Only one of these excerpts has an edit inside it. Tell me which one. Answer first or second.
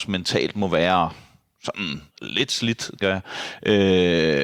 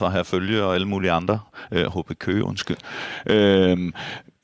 first